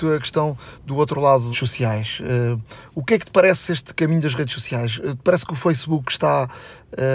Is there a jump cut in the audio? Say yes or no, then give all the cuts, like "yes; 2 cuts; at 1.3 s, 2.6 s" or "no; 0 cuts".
yes; 1 cut; at 1.5 s